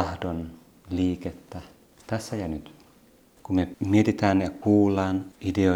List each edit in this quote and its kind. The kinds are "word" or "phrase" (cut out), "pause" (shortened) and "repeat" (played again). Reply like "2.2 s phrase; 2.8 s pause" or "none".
none